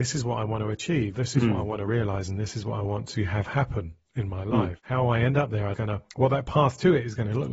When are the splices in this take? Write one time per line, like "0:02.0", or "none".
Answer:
0:01.1
0:05.7
0:06.1